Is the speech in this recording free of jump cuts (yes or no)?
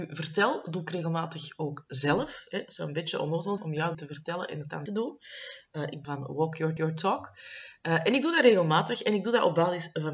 no